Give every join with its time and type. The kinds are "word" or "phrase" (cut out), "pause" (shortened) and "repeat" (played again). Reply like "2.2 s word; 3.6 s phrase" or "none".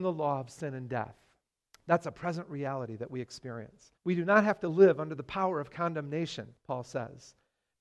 1.6 s pause; 4.0 s pause; 6.6 s pause